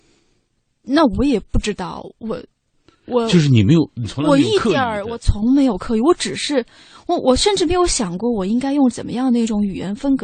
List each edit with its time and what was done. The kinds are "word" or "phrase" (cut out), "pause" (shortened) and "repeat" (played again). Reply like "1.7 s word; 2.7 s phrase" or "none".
none